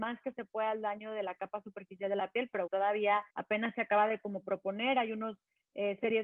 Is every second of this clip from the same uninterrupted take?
no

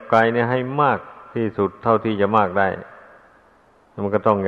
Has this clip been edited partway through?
no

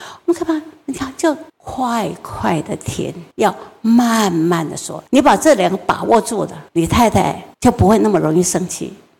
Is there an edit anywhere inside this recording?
yes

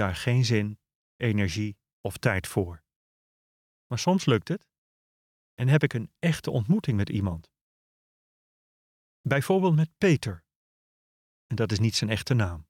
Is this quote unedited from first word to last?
yes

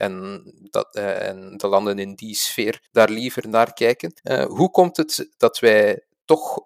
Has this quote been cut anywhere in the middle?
yes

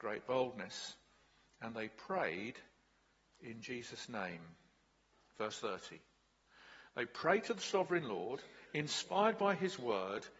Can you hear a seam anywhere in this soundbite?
no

